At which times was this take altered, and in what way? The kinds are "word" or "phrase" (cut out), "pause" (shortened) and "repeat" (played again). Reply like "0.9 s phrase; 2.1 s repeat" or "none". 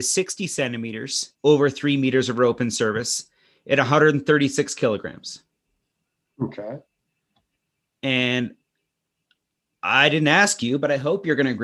1.3 s pause